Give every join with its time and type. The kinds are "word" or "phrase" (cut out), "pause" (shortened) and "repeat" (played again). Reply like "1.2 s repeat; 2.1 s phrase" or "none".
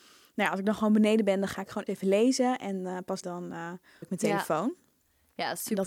1.9 s word; 3.2 s word; 4.0 s word